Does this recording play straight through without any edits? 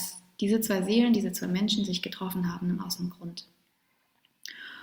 yes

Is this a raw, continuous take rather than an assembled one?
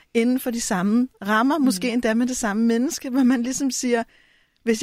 yes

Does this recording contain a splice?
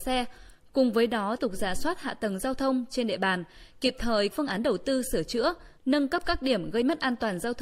yes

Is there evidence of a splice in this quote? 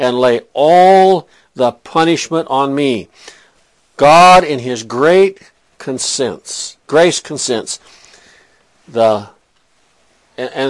no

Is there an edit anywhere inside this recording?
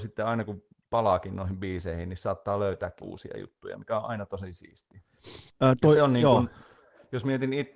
yes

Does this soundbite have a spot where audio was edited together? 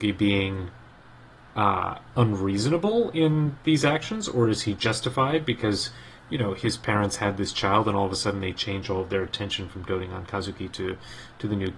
no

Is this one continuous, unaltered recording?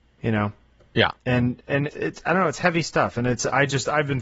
no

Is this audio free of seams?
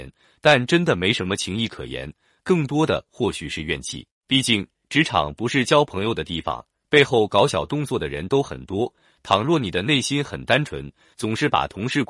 no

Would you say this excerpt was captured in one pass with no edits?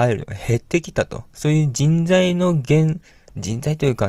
no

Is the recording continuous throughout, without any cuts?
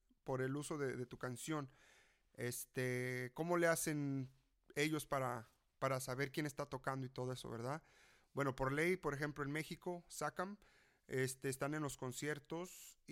yes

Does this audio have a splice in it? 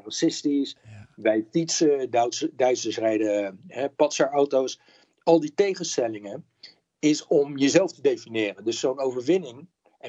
no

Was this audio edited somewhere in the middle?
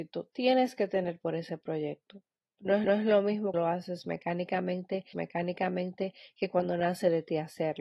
yes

